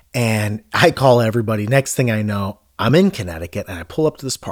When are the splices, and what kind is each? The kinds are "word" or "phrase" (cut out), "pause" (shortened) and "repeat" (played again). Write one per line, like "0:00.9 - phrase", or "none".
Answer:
none